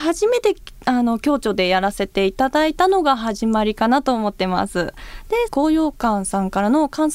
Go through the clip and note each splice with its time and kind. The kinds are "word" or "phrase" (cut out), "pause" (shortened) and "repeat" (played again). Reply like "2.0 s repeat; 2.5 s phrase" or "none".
5.5 s phrase